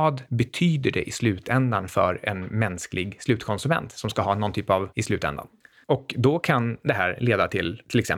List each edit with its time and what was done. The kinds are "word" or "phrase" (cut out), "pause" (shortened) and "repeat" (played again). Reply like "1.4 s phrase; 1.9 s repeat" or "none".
4.9 s word